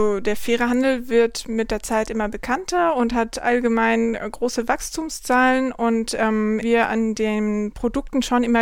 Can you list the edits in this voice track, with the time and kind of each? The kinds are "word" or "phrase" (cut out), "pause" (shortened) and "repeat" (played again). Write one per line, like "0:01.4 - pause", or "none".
0:06.6 - phrase